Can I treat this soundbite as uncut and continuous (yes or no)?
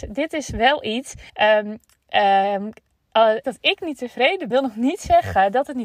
no